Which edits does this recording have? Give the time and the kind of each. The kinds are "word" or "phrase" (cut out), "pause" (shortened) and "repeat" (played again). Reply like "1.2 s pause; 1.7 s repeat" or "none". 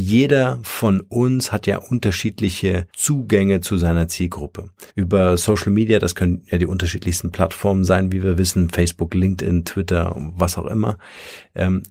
2.9 s pause; 4.9 s pause